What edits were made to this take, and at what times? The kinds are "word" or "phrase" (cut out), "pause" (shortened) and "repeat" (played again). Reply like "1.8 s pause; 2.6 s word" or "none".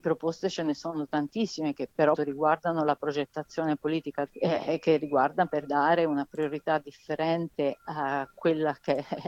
2.1 s word; 4.3 s phrase; 5.6 s word; 7.8 s word